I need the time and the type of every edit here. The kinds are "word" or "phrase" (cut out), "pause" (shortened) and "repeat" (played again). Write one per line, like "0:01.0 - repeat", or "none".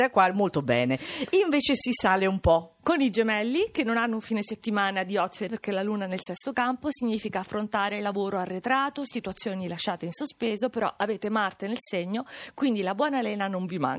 0:05.5 - word